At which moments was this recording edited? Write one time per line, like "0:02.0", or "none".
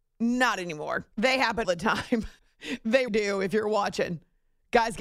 0:01.1
0:01.6
0:02.4
0:03.1